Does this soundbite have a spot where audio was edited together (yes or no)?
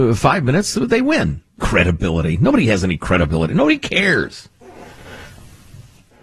yes